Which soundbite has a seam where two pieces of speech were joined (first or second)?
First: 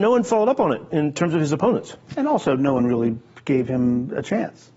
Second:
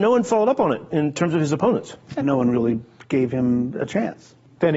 second